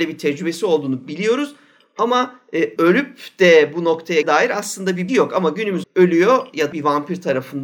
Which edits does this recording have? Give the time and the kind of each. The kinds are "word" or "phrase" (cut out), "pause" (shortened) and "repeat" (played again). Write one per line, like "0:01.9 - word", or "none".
0:02.8 - word
0:04.2 - word
0:05.1 - word
0:05.8 - word
0:06.7 - word